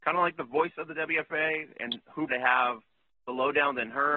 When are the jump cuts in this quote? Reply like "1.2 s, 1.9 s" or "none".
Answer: 2.3 s